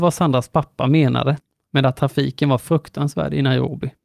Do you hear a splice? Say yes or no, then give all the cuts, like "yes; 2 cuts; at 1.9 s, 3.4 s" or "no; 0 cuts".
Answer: no; 0 cuts